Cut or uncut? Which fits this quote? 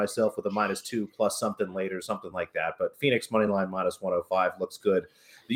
uncut